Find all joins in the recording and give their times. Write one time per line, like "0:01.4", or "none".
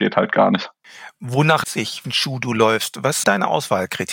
0:01.6
0:02.0
0:03.2

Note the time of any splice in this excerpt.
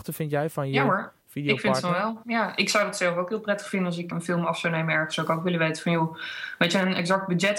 0:04.1

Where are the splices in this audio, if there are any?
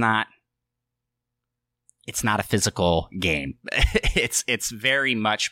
none

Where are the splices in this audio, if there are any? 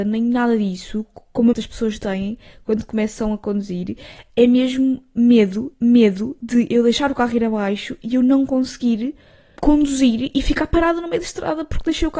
0:01.5
0:05.7
0:09.6

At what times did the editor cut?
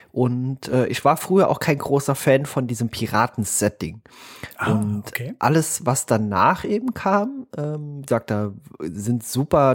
none

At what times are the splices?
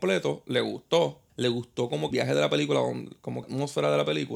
0:01.3
0:02.1
0:03.4

